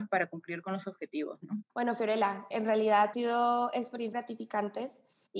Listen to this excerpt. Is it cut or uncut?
cut